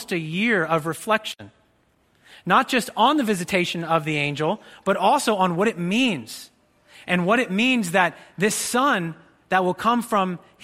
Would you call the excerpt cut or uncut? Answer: uncut